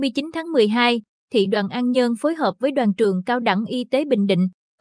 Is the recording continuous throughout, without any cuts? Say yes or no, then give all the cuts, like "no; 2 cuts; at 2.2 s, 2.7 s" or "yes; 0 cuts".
yes; 0 cuts